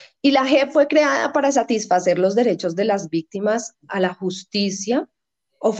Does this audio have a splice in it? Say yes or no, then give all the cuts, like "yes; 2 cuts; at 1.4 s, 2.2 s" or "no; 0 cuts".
no; 0 cuts